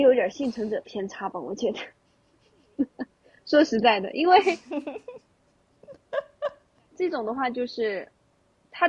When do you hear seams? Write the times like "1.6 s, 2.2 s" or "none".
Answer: 6.9 s